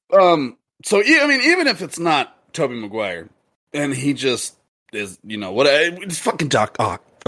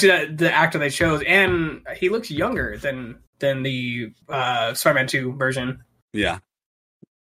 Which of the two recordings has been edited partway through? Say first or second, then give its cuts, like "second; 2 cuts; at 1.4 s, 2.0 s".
second; 2 cuts; at 3.3 s, 4.2 s